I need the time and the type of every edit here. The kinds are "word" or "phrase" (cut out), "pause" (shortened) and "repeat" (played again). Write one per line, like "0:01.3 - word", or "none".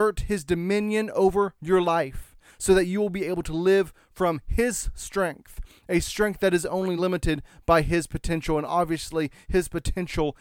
none